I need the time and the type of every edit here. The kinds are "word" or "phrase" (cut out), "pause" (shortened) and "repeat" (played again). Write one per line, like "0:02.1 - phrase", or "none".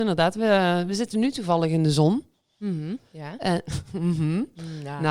none